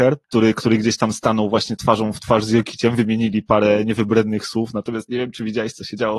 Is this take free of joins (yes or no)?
yes